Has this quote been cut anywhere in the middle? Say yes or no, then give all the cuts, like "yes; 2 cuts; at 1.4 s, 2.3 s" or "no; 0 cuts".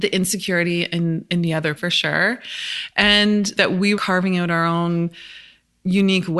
yes; 3 cuts; at 1.8 s, 3.5 s, 3.9 s